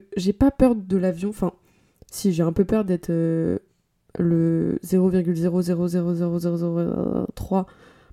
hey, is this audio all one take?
yes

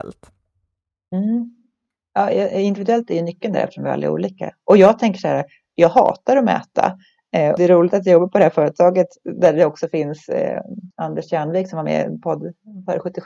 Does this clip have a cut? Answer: yes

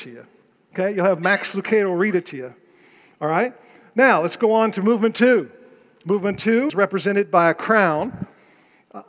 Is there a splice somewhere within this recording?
yes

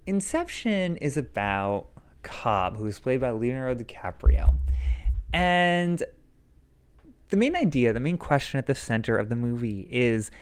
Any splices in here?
no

